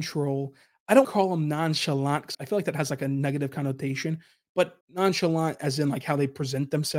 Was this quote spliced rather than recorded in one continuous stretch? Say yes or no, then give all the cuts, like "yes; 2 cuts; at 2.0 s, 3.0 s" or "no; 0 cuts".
yes; 3 cuts; at 1.0 s, 2.3 s, 4.8 s